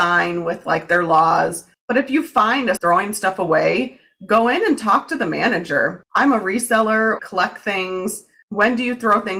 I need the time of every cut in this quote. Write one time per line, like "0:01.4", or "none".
0:02.8
0:07.2